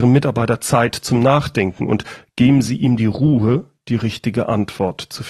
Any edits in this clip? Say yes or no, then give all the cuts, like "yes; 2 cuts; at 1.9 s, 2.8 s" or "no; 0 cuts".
no; 0 cuts